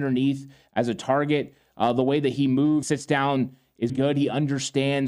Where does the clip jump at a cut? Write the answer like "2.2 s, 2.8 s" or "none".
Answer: 2.8 s, 3.9 s